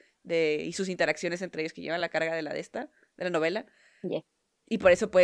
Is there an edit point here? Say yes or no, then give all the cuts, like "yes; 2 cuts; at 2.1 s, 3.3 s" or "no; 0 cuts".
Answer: no; 0 cuts